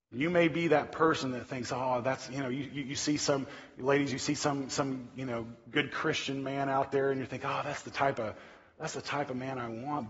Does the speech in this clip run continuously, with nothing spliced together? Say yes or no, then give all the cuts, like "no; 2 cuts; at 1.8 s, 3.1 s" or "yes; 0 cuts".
yes; 0 cuts